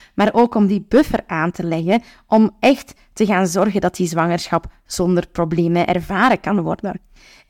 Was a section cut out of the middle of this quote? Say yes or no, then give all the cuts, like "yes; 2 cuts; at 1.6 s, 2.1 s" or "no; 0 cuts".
no; 0 cuts